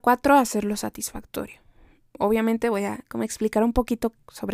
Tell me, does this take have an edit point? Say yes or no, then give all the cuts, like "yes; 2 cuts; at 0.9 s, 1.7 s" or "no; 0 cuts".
no; 0 cuts